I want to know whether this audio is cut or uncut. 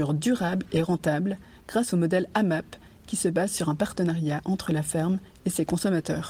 uncut